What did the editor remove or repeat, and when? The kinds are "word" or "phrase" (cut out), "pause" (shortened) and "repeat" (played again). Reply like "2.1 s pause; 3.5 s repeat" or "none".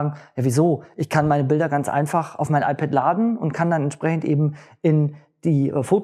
none